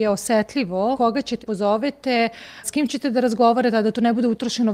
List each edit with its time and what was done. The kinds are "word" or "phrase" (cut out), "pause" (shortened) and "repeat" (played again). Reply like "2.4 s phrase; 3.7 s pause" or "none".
0.9 s word; 1.4 s word; 2.6 s word